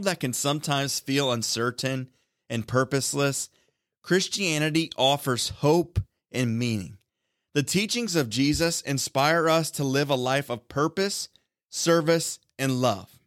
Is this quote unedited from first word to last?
yes; 0 cuts

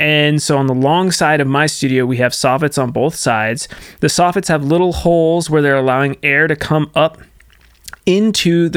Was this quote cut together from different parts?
no; 0 cuts

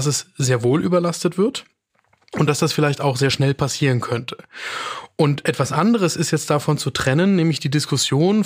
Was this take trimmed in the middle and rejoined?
no; 0 cuts

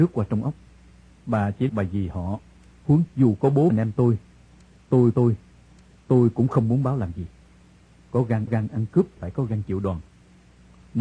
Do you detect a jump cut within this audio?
yes; 6 cuts; at 1.7 s, 3.1 s, 3.7 s, 5.1 s, 8.5 s, 9.2 s

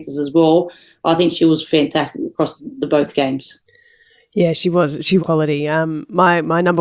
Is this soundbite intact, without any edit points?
no; 1 cut; at 5.2 s

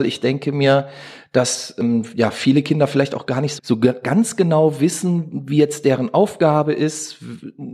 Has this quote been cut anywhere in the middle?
yes; 1 cut; at 3.6 s

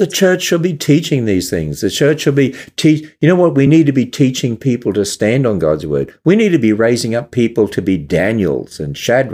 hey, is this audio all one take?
yes; 0 cuts

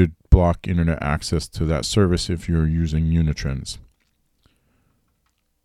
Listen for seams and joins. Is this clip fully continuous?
yes; 0 cuts

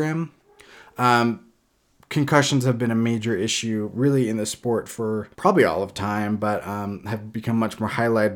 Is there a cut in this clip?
yes; 1 cut; at 5.3 s

